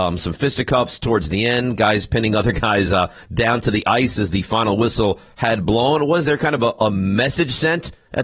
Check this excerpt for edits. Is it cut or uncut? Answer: uncut